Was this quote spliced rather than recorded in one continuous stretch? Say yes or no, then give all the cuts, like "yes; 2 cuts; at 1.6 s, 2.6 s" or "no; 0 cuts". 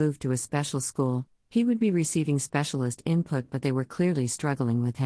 no; 0 cuts